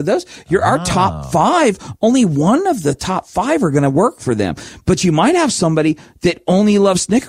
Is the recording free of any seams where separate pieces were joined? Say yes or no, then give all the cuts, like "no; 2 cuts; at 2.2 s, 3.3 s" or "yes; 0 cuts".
yes; 0 cuts